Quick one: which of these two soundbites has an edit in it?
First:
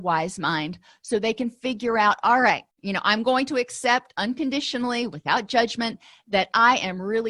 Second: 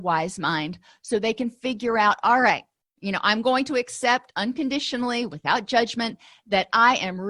first; 1 cut; at 2.7 s

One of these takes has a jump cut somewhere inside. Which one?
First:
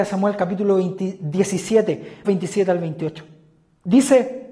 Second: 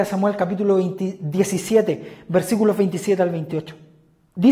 first; 1 cut; at 2.2 s

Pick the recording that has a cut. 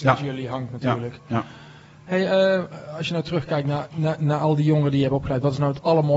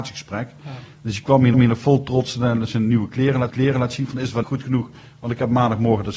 second; 3 cuts; at 1.5 s, 3.5 s, 4.4 s

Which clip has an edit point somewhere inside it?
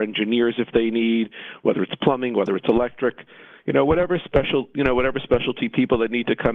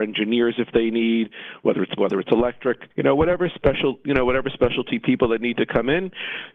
second; 2 cuts; at 2.0 s, 2.9 s

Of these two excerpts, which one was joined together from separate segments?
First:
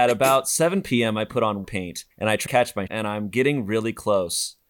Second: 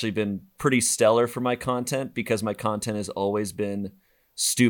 first; 4 cuts; at 1.6 s, 2.1 s, 2.5 s, 2.9 s

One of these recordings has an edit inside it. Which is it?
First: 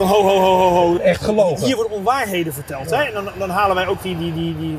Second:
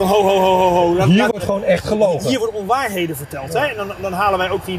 first; 1 cut; at 1.0 s

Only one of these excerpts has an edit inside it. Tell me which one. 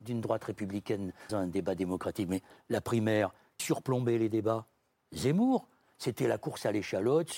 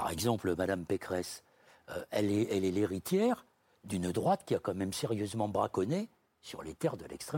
first; 2 cuts; at 1.3 s, 3.6 s

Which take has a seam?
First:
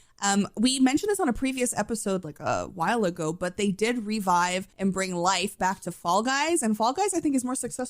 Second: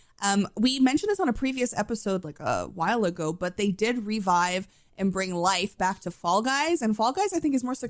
first; 1 cut; at 4.7 s

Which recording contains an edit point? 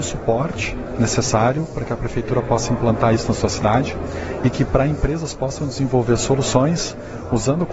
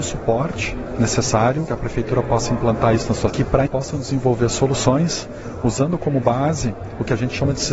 second; 3 cuts; at 1.7 s, 3.3 s, 3.7 s

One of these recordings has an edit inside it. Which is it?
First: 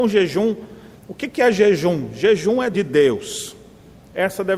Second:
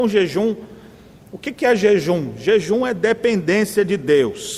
first; 2 cuts; at 1.0 s, 2.7 s

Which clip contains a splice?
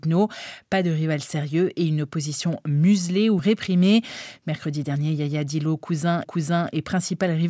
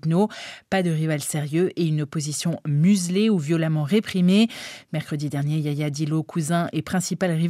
first; 2 cuts; at 3.4 s, 6.2 s

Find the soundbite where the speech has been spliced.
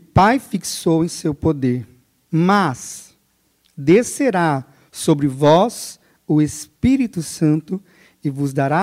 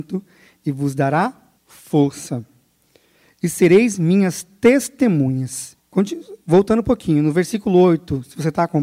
second; 2 cuts; at 1.6 s, 5.8 s

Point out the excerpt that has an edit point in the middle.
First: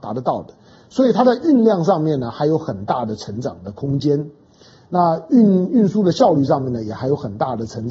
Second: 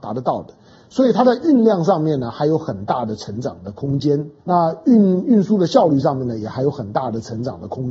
second; 1 cut; at 4.4 s

